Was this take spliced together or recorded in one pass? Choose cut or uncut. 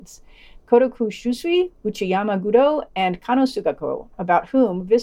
cut